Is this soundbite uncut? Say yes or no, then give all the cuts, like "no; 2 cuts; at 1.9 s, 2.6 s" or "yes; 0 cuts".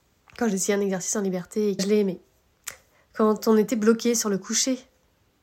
no; 1 cut; at 1.8 s